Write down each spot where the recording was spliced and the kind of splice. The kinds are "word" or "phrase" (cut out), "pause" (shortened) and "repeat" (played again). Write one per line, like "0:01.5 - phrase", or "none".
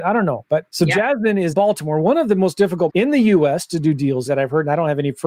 0:01.5 - word
0:02.9 - word
0:04.3 - phrase